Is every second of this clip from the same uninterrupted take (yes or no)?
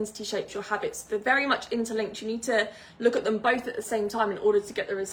yes